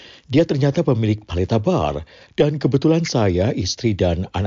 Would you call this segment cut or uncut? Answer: uncut